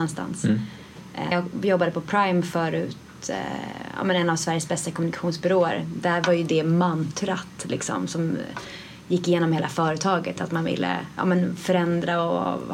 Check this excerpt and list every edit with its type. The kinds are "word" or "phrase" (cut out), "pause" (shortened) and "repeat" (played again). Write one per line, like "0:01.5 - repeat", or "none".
0:01.3 - word